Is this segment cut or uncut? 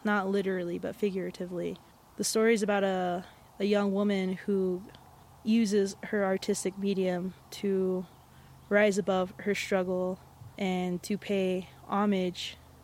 cut